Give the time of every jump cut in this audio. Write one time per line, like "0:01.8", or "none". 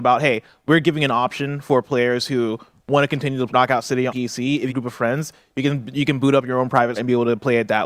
0:03.5
0:04.1
0:04.7
0:07.0